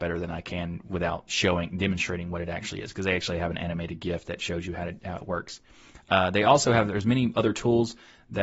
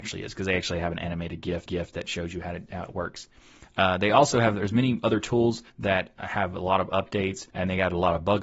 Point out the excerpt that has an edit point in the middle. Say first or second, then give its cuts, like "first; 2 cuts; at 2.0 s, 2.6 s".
second; 3 cuts; at 1.7 s, 5.7 s, 7.5 s